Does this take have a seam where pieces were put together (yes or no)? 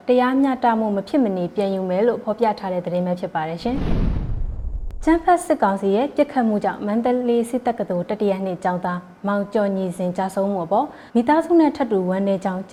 yes